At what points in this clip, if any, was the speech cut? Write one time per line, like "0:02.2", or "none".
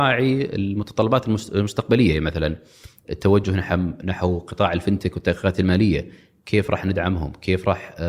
none